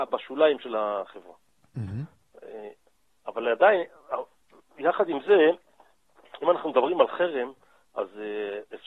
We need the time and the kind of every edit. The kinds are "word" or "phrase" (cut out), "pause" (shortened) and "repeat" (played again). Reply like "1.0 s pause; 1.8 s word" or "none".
none